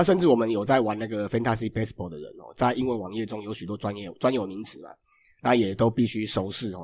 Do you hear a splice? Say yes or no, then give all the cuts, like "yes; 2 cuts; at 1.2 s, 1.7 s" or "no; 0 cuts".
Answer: no; 0 cuts